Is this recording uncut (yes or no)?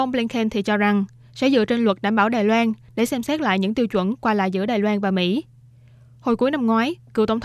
yes